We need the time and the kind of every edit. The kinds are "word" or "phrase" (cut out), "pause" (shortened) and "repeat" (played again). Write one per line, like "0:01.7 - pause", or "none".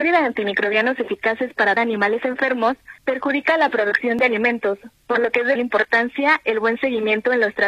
0:01.8 - word
0:03.0 - pause
0:05.6 - word